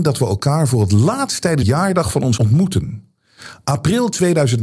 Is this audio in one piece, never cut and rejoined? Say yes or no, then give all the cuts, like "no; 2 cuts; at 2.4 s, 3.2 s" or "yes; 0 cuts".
no; 2 cuts; at 1.6 s, 2.4 s